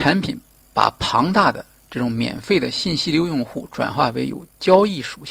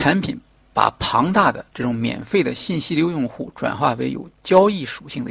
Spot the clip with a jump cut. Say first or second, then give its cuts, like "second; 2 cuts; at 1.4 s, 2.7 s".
second; 1 cut; at 1.7 s